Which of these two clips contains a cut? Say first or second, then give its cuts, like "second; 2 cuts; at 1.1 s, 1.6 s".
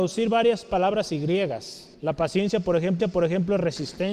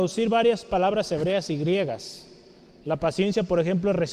first; 3 cuts; at 1.1 s, 1.9 s, 3.0 s